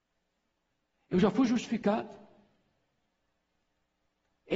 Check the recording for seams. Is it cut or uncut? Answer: uncut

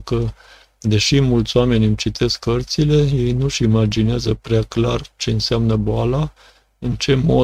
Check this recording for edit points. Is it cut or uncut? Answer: uncut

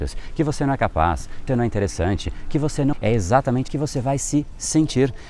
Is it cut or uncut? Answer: cut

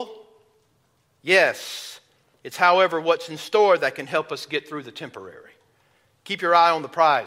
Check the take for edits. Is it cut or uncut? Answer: uncut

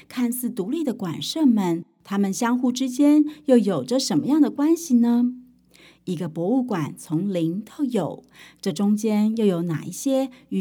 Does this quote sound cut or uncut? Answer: uncut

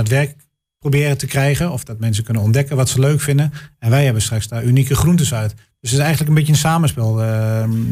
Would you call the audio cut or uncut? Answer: uncut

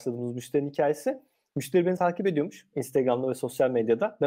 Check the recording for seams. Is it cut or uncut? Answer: cut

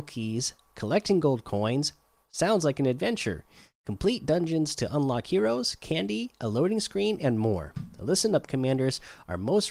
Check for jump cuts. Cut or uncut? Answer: uncut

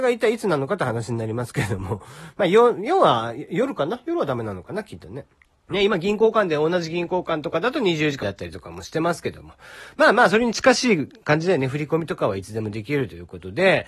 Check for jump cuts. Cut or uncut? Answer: cut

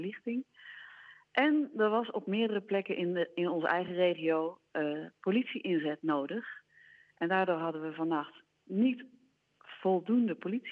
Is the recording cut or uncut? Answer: uncut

